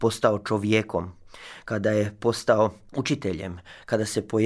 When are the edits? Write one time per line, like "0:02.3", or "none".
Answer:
none